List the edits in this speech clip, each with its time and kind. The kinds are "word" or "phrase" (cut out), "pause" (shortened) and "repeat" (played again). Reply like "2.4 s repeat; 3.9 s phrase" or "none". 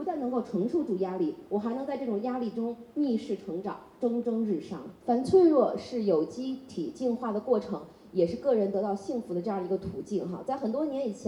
5.0 s pause